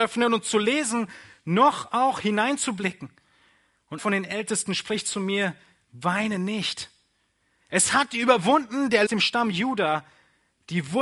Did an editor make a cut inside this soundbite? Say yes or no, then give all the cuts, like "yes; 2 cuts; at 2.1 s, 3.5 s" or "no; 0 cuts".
yes; 2 cuts; at 4.0 s, 9.1 s